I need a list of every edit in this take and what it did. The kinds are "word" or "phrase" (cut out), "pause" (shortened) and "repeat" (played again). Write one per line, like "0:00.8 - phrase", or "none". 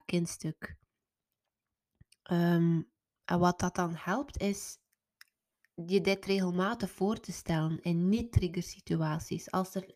none